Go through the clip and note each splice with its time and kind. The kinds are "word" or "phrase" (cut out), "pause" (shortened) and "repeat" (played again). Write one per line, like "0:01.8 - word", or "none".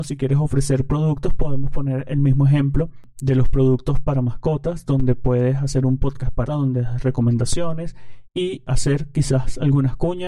0:06.5 - phrase